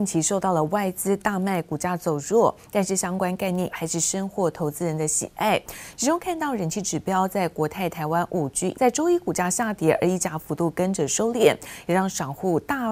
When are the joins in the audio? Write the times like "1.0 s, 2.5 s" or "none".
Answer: 3.7 s, 8.7 s